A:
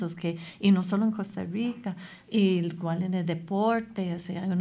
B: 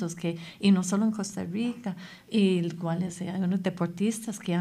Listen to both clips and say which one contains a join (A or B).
B